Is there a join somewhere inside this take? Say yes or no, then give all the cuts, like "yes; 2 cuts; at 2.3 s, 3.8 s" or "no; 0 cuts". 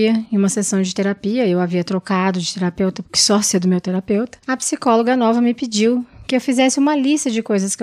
yes; 2 cuts; at 3.1 s, 4.4 s